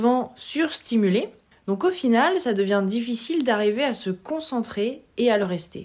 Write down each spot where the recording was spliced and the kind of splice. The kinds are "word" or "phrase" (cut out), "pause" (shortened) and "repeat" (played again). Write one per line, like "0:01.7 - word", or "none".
0:01.5 - pause